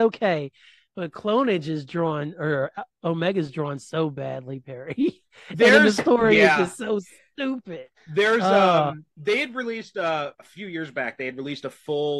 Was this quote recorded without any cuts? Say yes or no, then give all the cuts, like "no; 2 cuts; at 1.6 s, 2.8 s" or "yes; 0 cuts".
no; 3 cuts; at 8.0 s, 9.1 s, 10.3 s